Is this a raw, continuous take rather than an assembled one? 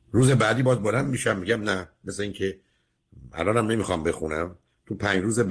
yes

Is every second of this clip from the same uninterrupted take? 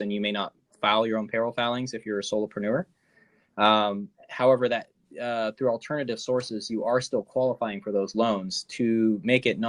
yes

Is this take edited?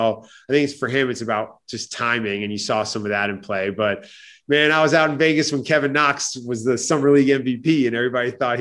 no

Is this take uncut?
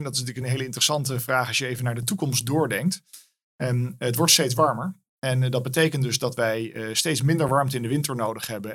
yes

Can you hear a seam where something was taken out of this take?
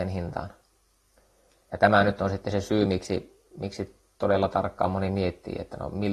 no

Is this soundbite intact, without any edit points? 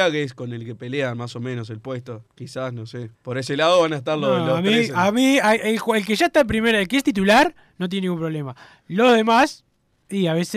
no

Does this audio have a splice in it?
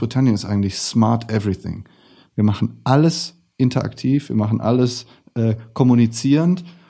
no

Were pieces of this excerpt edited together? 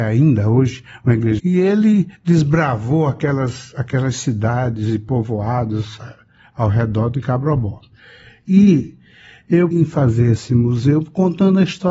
yes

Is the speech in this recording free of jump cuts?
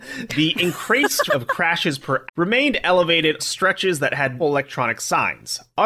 no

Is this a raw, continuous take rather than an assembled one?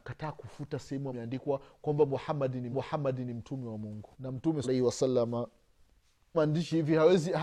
no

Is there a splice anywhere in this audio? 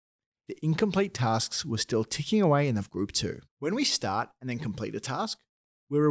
yes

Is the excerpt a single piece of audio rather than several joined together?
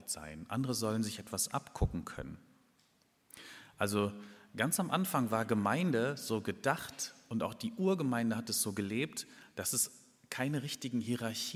yes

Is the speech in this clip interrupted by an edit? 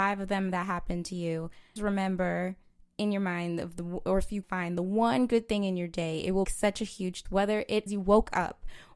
yes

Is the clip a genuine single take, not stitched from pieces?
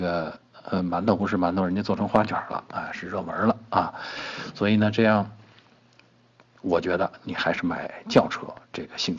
yes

